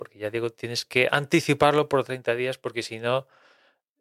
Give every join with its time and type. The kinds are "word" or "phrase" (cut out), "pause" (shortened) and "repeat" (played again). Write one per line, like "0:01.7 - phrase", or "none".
none